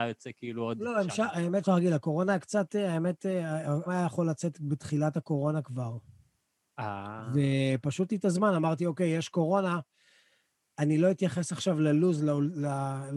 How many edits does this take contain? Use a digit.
3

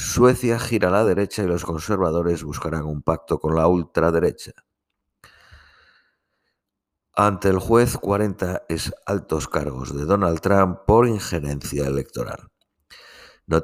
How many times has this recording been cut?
0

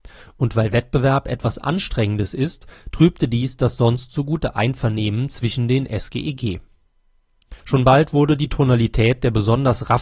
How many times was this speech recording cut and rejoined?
1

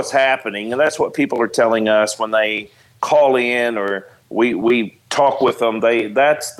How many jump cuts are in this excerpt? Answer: 0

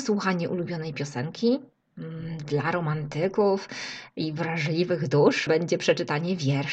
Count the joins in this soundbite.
1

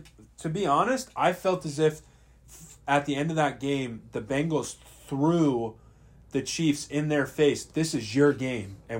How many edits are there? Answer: 0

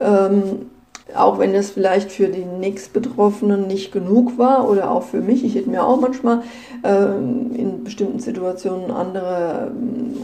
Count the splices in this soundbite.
1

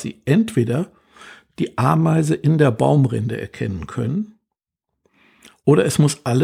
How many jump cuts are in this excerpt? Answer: 0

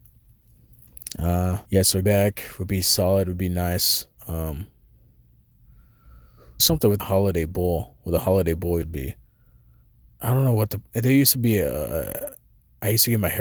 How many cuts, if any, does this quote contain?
6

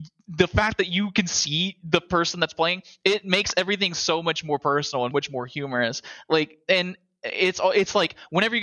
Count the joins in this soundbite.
1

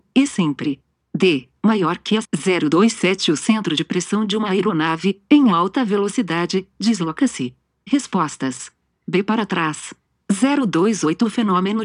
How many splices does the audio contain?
1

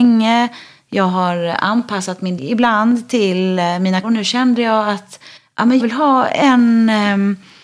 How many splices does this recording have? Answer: 4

